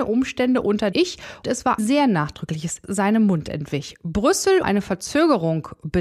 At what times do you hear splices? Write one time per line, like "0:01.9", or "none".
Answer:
0:00.9
0:01.4
0:01.8
0:02.8
0:04.6

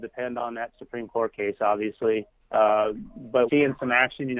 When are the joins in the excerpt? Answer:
0:02.4
0:03.5

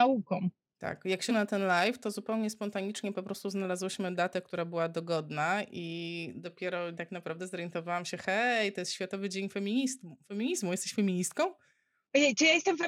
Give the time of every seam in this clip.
0:01.3
0:06.9

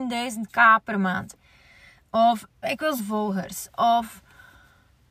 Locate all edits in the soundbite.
0:02.6
0:03.0

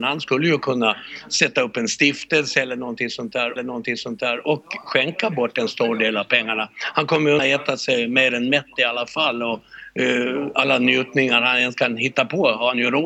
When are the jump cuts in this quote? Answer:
0:03.6
0:07.4

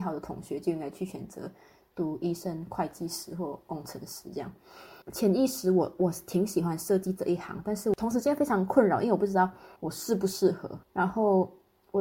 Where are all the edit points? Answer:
0:05.0
0:09.8
0:10.8

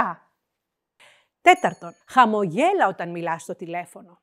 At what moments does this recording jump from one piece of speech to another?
0:02.0

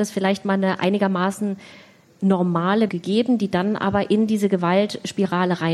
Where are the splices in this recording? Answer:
0:02.9

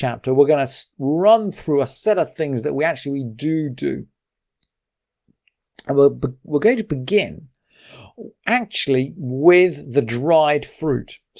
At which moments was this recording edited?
0:00.9

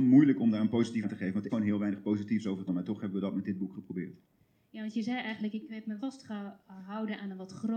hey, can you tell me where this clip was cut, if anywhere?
0:01.0
0:01.5
0:02.7
0:06.0

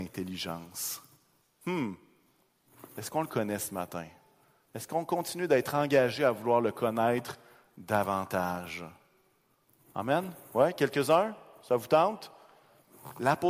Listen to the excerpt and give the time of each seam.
none

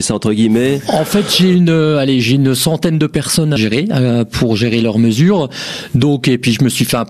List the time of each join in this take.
0:03.6

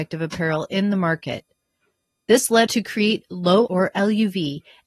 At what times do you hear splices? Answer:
0:02.7
0:03.7

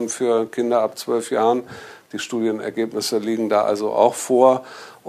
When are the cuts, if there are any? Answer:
none

